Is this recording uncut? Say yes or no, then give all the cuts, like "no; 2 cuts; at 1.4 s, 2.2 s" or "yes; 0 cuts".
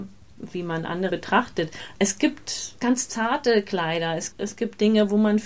no; 3 cuts; at 1.1 s, 2.8 s, 4.3 s